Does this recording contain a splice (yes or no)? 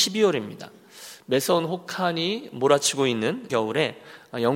yes